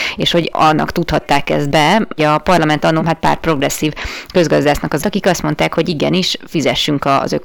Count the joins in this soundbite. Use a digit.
3